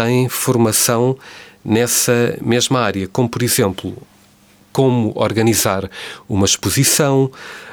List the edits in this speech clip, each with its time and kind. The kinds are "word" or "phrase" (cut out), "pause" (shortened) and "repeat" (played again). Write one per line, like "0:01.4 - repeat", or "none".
none

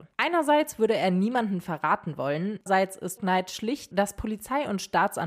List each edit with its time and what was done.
0:02.7 - word
0:03.2 - word
0:03.9 - phrase

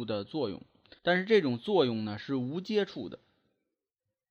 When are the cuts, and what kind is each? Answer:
0:01.0 - pause

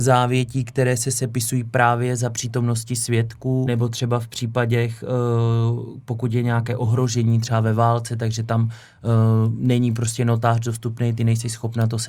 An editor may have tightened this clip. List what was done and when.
0:03.7 - word

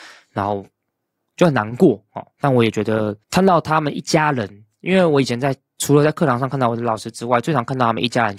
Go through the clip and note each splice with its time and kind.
0:02.3 - pause
0:03.2 - pause

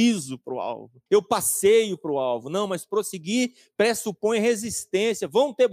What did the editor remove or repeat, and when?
0:01.1 - pause

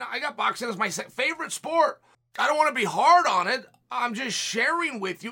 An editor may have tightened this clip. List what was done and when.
0:02.1 - pause

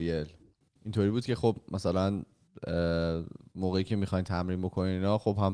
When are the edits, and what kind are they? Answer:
none

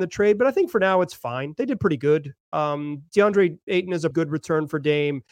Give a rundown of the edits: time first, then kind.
0:04.1 - word

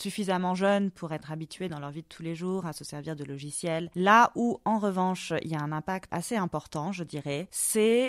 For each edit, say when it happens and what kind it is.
none

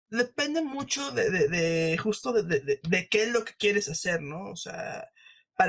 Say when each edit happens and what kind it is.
none

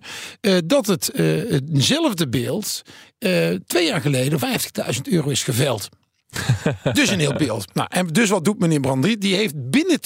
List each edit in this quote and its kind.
0:04.4 - word
0:07.3 - word

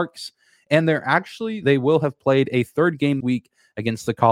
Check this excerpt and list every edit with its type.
0:01.6 - word
0:03.2 - word

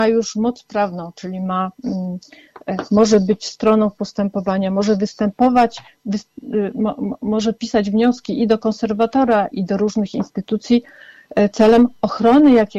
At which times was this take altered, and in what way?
0:09.5 - word

